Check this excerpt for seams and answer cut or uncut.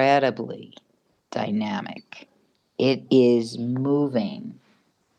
uncut